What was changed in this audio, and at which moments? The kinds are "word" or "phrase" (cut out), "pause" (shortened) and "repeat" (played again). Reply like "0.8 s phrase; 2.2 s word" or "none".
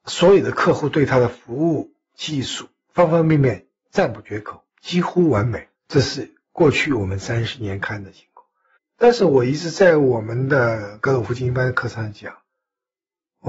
4.7 s pause; 5.7 s pause; 8.8 s pause